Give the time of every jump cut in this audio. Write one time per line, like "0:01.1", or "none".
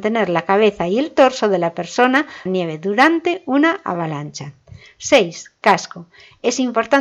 0:02.5